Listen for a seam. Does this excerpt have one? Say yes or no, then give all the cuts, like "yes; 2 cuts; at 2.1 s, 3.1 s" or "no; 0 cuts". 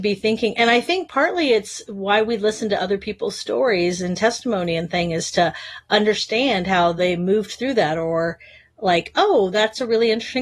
no; 0 cuts